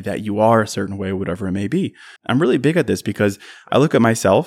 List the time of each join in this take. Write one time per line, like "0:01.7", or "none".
0:02.2